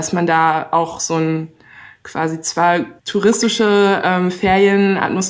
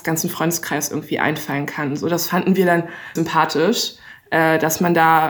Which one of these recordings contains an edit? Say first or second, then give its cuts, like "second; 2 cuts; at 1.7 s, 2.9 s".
second; 1 cut; at 3.2 s